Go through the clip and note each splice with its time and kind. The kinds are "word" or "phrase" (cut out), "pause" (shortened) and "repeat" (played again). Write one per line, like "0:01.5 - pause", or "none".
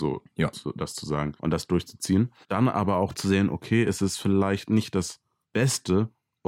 0:01.4 - pause
0:02.4 - pause
0:05.4 - pause